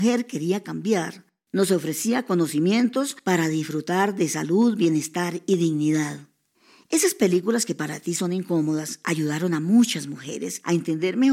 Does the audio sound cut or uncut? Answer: uncut